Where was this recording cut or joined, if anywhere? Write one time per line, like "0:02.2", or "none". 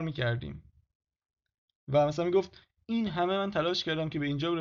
none